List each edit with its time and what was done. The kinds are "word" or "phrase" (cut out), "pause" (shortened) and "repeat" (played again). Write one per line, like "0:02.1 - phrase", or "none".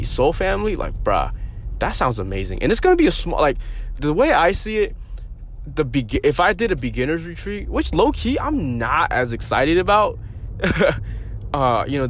0:04.0 - word